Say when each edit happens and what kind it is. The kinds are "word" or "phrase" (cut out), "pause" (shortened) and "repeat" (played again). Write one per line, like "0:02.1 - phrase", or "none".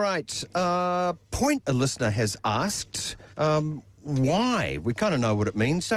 0:01.6 - word
0:03.3 - pause